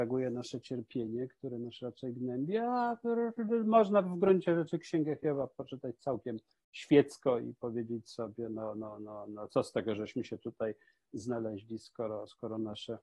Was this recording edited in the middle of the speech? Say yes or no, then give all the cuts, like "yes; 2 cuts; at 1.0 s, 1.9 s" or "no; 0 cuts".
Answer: no; 0 cuts